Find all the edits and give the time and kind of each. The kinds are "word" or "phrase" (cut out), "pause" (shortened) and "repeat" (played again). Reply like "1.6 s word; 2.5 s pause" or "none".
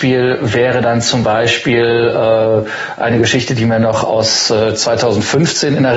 none